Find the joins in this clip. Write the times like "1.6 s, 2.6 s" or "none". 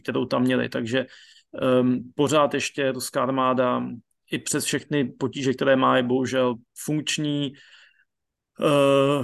none